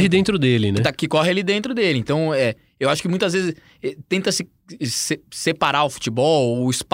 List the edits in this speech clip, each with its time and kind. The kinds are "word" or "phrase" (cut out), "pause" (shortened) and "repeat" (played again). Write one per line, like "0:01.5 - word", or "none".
none